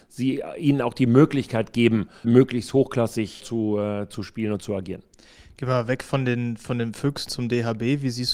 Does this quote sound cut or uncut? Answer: cut